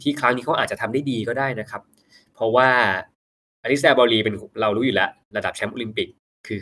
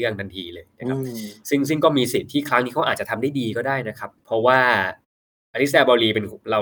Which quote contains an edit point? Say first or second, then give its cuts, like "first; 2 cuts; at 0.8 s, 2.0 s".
second; 1 cut; at 4.2 s